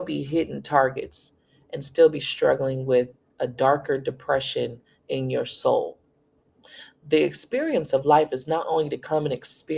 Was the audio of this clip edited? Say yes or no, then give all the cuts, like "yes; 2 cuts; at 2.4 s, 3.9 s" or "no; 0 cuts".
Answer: no; 0 cuts